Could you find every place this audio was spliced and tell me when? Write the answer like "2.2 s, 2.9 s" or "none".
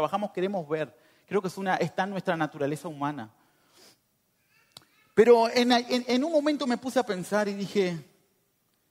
none